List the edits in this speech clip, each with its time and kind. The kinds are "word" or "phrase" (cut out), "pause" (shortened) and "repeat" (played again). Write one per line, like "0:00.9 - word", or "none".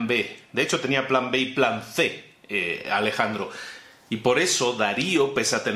none